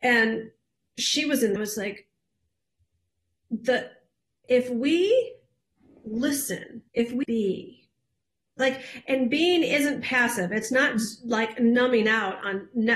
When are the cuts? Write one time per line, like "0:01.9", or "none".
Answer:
0:01.6
0:04.4
0:06.9
0:07.2